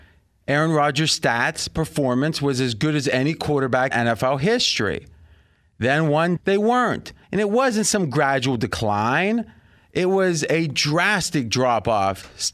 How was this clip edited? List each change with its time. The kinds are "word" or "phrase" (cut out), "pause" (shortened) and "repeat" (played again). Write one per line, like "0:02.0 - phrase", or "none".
0:03.9 - word
0:06.4 - phrase
0:07.2 - pause